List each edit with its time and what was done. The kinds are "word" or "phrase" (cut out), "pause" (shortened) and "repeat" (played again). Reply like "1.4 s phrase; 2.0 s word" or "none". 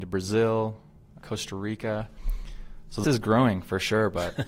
1.2 s word; 3.0 s word